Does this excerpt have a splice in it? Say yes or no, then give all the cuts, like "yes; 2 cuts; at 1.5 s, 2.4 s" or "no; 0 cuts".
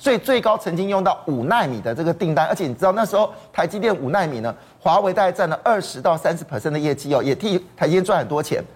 no; 0 cuts